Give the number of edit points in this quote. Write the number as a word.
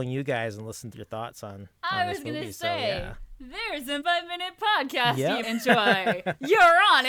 four